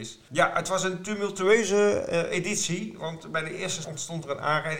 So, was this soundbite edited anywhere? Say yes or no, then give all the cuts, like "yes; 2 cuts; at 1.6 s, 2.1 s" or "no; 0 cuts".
yes; 1 cut; at 3.8 s